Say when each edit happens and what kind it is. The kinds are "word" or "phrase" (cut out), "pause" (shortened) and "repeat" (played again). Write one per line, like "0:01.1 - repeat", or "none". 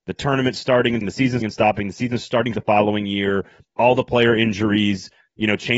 0:01.0 - word
0:01.4 - word
0:02.5 - word